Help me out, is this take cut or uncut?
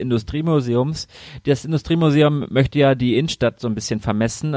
uncut